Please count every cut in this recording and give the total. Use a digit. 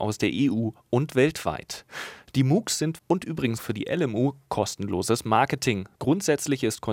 3